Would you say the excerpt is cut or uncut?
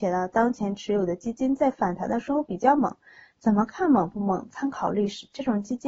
uncut